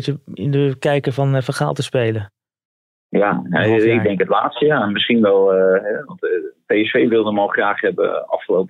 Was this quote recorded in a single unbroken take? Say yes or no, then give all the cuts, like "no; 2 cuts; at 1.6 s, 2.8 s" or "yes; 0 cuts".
yes; 0 cuts